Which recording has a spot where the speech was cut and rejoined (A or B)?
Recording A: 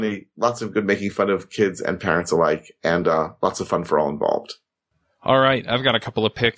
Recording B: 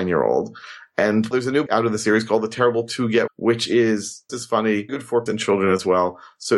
B